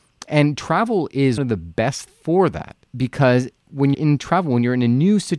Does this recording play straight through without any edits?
no; 4 cuts; at 1.4 s, 2.1 s, 2.9 s, 3.9 s

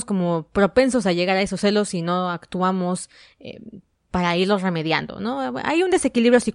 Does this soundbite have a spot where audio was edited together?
no; 0 cuts

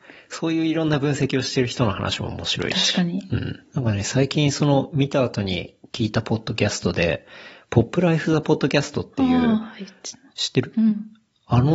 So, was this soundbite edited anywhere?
yes; 1 cut; at 3.7 s

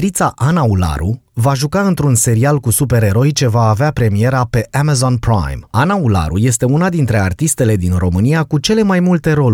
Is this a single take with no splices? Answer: no; 1 cut; at 5.7 s

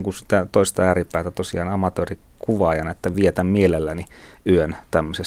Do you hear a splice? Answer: no; 0 cuts

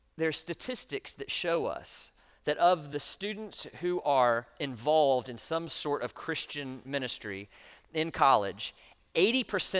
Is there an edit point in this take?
no; 0 cuts

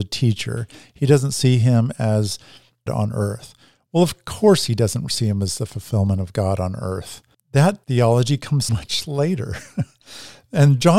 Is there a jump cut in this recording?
yes; 2 cuts; at 2.9 s, 8.7 s

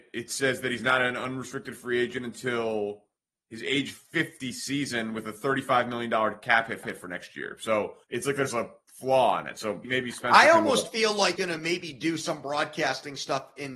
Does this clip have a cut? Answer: yes; 5 cuts; at 3.2 s, 6.8 s, 8.0 s, 9.8 s, 11.4 s

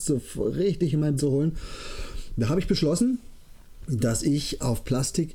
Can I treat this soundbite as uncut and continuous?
no; 1 cut; at 1.2 s

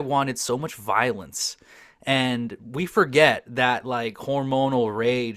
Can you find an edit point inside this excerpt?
no; 0 cuts

